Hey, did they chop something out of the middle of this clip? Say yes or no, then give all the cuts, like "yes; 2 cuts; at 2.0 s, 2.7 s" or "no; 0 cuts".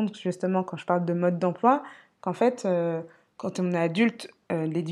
no; 0 cuts